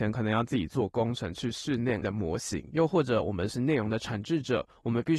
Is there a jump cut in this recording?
yes; 1 cut; at 2.0 s

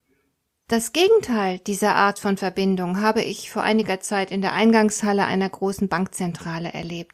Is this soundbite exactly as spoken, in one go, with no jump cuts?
yes; 0 cuts

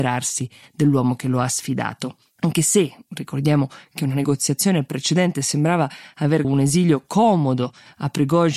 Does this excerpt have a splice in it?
yes; 1 cut; at 6.4 s

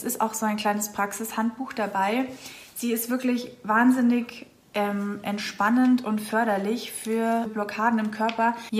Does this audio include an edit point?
no; 0 cuts

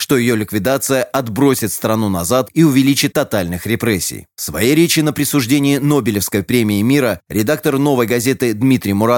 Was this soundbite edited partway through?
yes; 1 cut; at 3.1 s

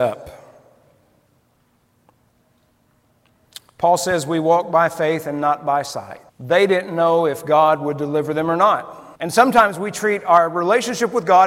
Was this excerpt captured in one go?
no; 2 cuts; at 6.3 s, 9.2 s

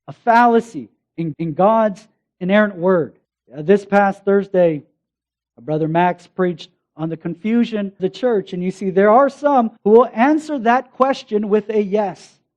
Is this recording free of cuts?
no; 4 cuts; at 1.3 s, 3.2 s, 8.0 s, 9.8 s

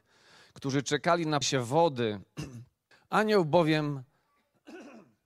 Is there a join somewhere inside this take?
yes; 2 cuts; at 1.4 s, 2.9 s

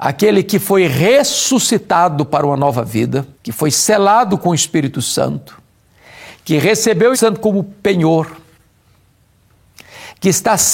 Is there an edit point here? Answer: yes; 2 cuts; at 3.3 s, 7.1 s

